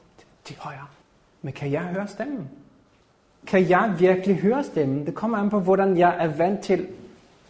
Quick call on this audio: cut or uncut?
cut